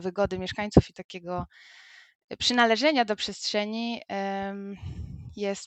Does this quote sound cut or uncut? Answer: cut